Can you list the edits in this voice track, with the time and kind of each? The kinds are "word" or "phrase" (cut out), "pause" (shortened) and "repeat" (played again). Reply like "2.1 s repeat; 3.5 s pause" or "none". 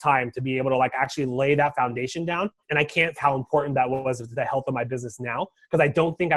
2.6 s pause; 3.2 s phrase